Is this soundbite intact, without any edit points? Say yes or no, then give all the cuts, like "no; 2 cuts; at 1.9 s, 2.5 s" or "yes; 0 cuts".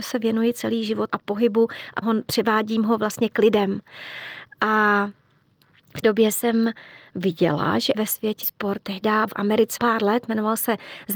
no; 7 cuts; at 1.1 s, 2.0 s, 6.0 s, 7.9 s, 8.4 s, 9.3 s, 9.8 s